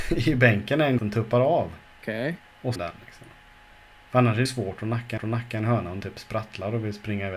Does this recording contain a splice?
yes; 5 cuts; at 1.0 s, 2.8 s, 4.5 s, 5.2 s, 6.0 s

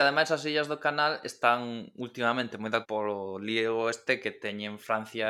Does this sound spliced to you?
yes; 1 cut; at 2.8 s

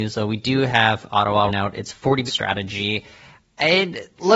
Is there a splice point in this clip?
yes; 2 cuts; at 1.5 s, 2.3 s

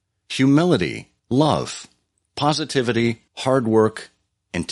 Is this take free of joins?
no; 2 cuts; at 1.2 s, 3.3 s

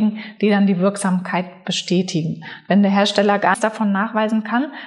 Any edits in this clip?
yes; 1 cut; at 3.5 s

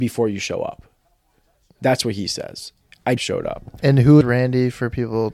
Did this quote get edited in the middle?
yes; 2 cuts; at 3.2 s, 4.2 s

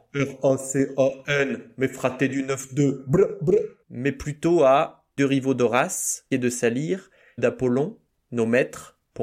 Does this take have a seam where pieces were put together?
yes; 4 cuts; at 3.8 s, 5.2 s, 6.3 s, 7.4 s

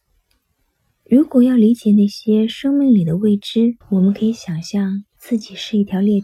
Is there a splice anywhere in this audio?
yes; 1 cut; at 3.8 s

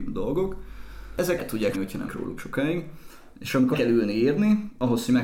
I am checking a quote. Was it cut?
yes; 5 cuts; at 1.4 s, 1.7 s, 2.1 s, 2.4 s, 3.7 s

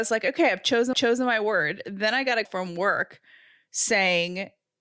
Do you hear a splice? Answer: yes; 2 cuts; at 0.9 s, 2.4 s

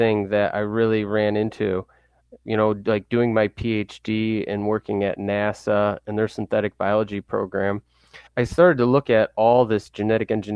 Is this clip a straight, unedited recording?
no; 1 cut; at 8.3 s

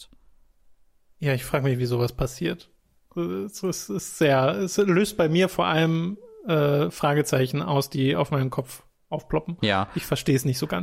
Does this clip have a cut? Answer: no; 0 cuts

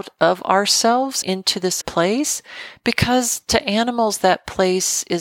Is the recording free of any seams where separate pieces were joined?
no; 2 cuts; at 1.2 s, 1.8 s

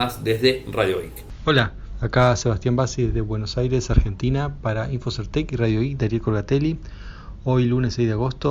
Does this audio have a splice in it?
no; 0 cuts

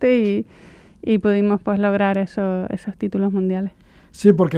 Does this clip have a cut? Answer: no; 0 cuts

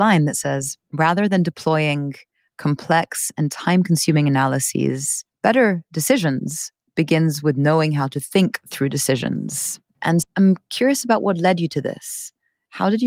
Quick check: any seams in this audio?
yes; 2 cuts; at 5.3 s, 10.2 s

